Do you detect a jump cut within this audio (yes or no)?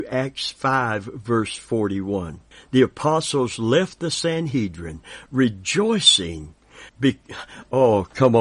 yes